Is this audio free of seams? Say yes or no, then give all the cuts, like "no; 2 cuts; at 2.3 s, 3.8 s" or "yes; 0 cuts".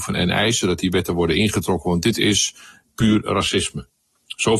yes; 0 cuts